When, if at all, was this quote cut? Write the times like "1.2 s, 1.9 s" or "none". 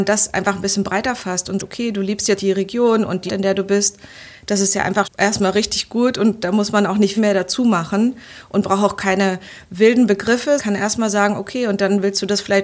1.6 s, 2.4 s, 3.3 s, 5.0 s, 7.2 s, 10.6 s